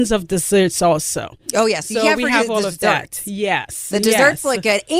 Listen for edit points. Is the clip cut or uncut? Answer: uncut